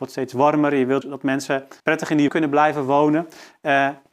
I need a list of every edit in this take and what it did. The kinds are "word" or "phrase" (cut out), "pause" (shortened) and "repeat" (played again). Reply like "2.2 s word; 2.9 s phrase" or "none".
1.0 s word; 1.8 s pause; 2.3 s word